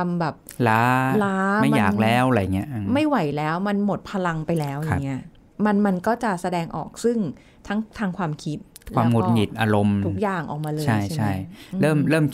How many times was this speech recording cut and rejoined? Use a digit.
0